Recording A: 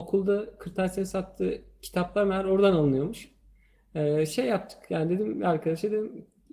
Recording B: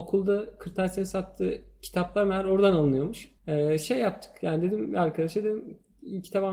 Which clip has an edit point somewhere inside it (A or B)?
B